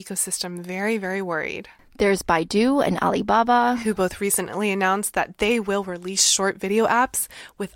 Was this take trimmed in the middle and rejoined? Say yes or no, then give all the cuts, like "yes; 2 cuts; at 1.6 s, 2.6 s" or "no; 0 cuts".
no; 0 cuts